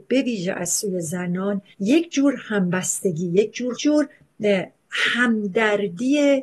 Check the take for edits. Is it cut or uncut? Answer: cut